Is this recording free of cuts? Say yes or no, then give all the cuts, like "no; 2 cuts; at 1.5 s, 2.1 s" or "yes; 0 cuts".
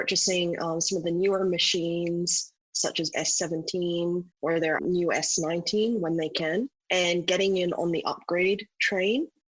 no; 4 cuts; at 3.1 s, 4.3 s, 4.8 s, 6.8 s